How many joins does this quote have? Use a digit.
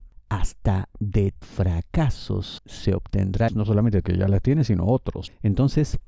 4